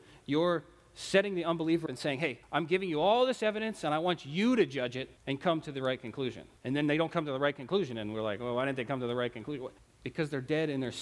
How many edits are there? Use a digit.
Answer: 5